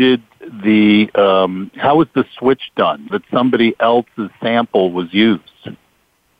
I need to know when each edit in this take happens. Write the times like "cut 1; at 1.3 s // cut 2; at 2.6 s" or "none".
cut 1; at 3.1 s